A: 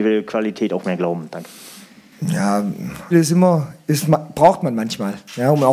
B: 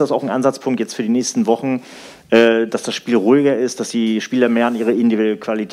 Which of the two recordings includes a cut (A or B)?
A